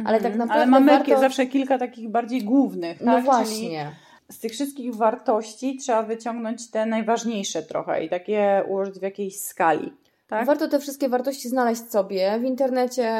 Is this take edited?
no; 0 cuts

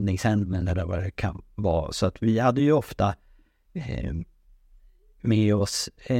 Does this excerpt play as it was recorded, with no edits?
yes; 0 cuts

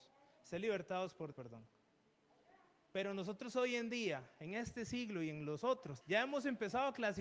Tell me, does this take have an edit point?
yes; 2 cuts; at 1.3 s, 6.0 s

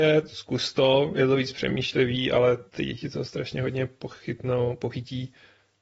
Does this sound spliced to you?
yes; 1 cut; at 2.7 s

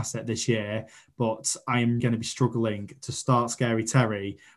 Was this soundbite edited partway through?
yes; 1 cut; at 2.0 s

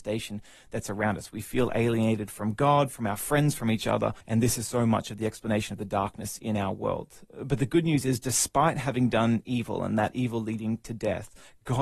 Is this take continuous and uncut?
no; 1 cut; at 4.2 s

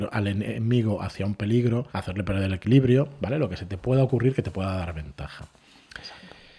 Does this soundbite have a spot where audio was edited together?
yes; 1 cut; at 1.9 s

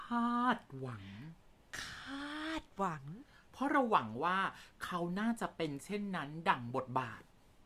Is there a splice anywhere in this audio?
no; 0 cuts

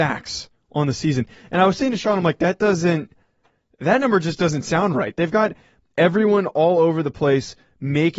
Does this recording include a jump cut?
no; 0 cuts

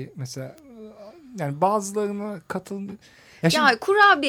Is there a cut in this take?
no; 0 cuts

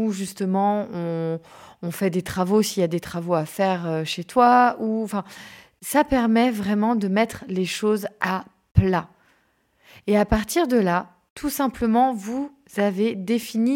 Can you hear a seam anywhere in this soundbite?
no; 0 cuts

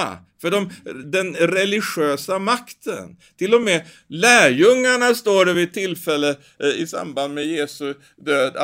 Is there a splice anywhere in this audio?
no; 0 cuts

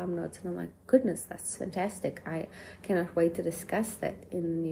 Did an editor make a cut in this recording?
no; 0 cuts

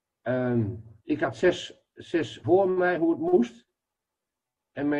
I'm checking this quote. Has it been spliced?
yes; 2 cuts; at 1.0 s, 2.4 s

